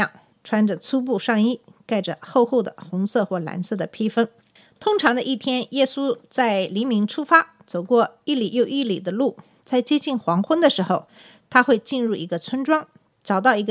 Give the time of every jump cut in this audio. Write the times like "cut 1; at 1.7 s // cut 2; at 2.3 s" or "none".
none